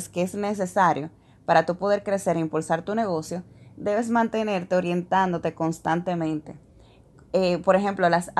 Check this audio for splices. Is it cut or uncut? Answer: uncut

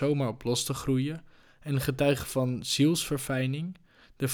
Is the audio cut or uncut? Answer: uncut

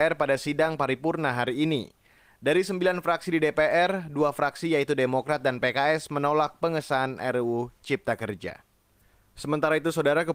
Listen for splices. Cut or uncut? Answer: uncut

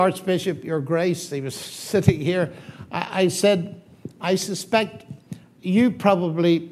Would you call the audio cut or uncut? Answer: uncut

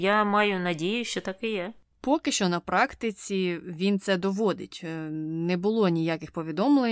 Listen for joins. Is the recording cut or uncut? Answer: uncut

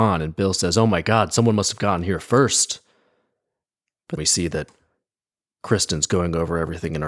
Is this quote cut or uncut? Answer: cut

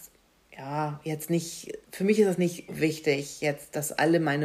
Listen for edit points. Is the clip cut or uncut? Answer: cut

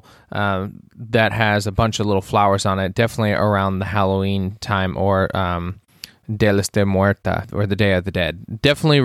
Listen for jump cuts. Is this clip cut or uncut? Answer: uncut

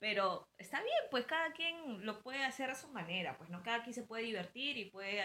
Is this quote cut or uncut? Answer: uncut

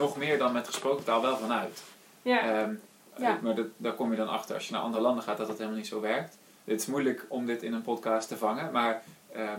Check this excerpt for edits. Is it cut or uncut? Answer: uncut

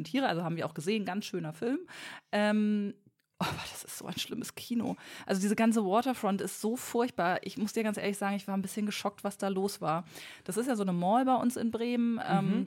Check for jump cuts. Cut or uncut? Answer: uncut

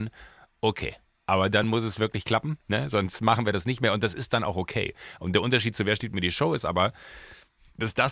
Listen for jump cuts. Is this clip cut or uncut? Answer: uncut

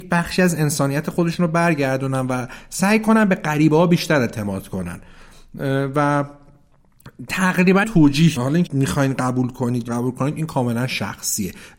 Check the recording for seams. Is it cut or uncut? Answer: cut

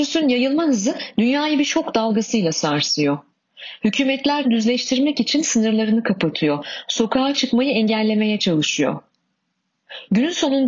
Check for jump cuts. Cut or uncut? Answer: cut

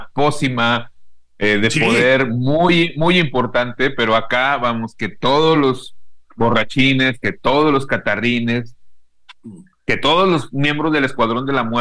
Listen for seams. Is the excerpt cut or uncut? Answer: uncut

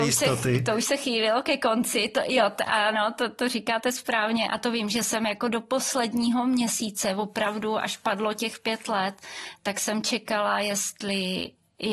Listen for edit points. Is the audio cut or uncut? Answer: uncut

